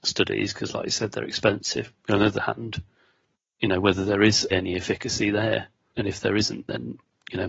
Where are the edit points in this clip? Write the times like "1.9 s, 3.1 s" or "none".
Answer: 2.0 s, 4.5 s, 5.9 s